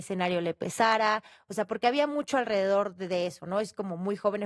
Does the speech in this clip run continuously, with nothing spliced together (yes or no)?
yes